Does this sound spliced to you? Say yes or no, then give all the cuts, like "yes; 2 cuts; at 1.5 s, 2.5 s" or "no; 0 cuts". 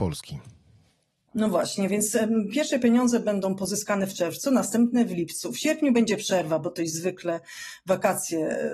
no; 0 cuts